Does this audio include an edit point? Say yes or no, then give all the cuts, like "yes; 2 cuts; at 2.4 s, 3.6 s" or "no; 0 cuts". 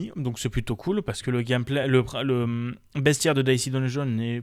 no; 0 cuts